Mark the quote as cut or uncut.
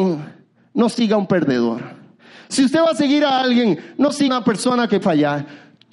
cut